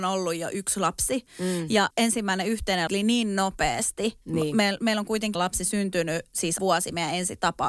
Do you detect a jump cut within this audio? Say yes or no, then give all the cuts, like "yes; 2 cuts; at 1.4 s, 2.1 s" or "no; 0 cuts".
yes; 4 cuts; at 1.9 s, 2.9 s, 5.3 s, 6.6 s